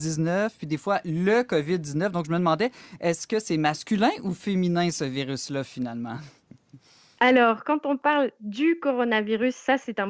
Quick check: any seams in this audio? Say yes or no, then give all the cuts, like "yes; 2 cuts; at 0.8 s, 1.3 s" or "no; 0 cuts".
no; 0 cuts